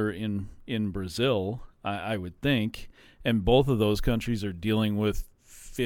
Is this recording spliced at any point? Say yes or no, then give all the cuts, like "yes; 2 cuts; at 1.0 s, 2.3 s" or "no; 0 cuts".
no; 0 cuts